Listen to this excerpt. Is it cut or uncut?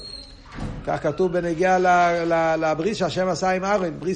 uncut